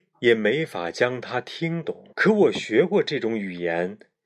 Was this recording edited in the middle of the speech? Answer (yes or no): yes